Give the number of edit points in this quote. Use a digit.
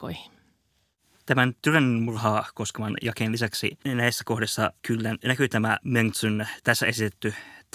0